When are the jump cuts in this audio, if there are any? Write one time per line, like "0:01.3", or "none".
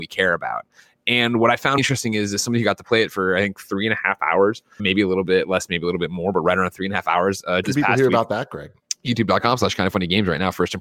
0:01.8
0:04.8
0:07.6